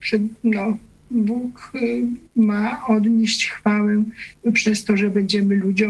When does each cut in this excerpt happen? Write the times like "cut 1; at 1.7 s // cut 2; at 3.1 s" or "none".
cut 1; at 2.3 s